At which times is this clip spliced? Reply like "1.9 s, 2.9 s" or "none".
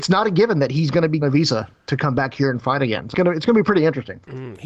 1.2 s, 3.1 s